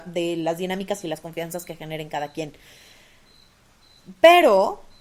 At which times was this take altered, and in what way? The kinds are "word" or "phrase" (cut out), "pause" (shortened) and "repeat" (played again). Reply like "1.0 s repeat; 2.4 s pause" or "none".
none